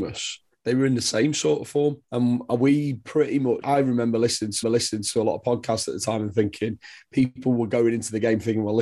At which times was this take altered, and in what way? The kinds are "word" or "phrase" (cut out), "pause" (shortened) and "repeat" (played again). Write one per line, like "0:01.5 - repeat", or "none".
0:02.0 - pause
0:03.6 - word
0:04.6 - repeat